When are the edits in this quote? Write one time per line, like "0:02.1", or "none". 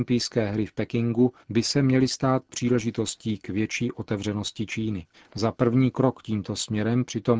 0:01.4
0:05.1